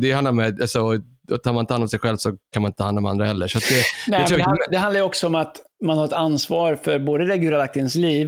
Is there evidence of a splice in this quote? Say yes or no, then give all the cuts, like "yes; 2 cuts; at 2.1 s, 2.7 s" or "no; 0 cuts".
no; 0 cuts